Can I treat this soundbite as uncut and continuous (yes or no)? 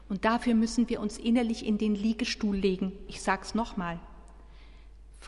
yes